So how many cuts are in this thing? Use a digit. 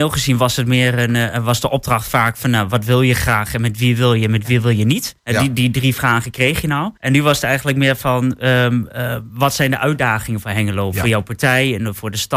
2